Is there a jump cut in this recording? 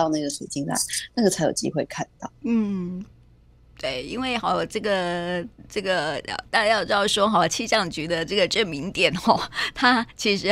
no; 0 cuts

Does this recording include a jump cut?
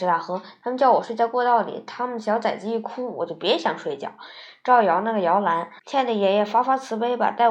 yes; 1 cut; at 5.8 s

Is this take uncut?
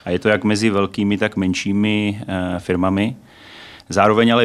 yes; 0 cuts

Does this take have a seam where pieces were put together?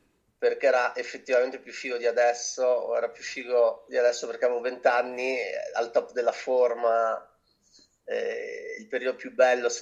no; 0 cuts

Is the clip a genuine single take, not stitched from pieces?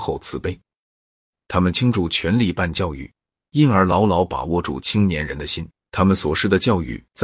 no; 1 cut; at 5.8 s

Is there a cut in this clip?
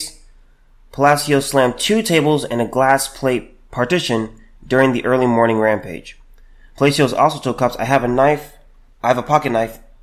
no; 0 cuts

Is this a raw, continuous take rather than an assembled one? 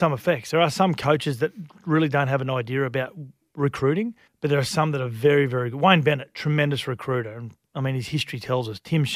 no; 1 cut; at 4.3 s

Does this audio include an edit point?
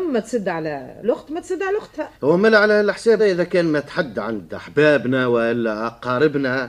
yes; 3 cuts; at 1.0 s, 2.2 s, 3.2 s

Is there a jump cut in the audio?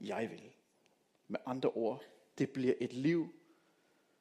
no; 0 cuts

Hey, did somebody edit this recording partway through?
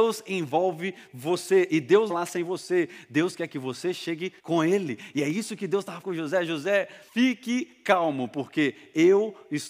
yes; 4 cuts; at 2.1 s, 4.4 s, 6.0 s, 7.1 s

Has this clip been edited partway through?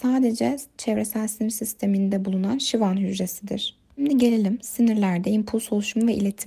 no; 0 cuts

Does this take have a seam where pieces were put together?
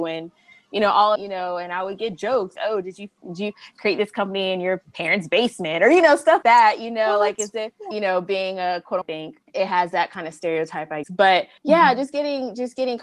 yes; 8 cuts; at 1.2 s, 2.6 s, 3.2 s, 6.4 s, 9.0 s, 9.4 s, 11.0 s, 11.6 s

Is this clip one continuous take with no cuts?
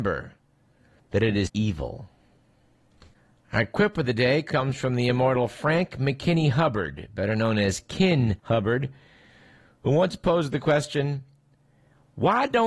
no; 2 cuts; at 1.5 s, 8.4 s

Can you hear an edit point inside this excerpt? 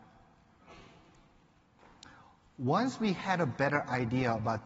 no; 0 cuts

